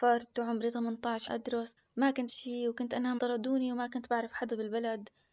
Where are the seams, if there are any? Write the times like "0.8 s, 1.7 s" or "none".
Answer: 1.3 s, 1.8 s, 2.3 s, 3.2 s